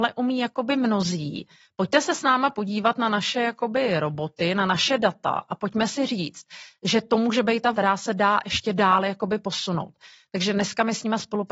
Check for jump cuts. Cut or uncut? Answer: cut